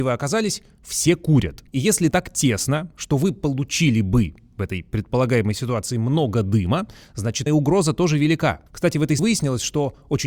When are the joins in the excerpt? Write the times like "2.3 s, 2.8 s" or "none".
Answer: 1.7 s, 2.1 s, 7.5 s, 8.7 s, 9.2 s